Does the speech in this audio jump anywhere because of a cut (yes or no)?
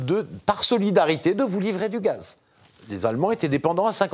no